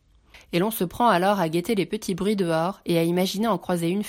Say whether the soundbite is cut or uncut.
uncut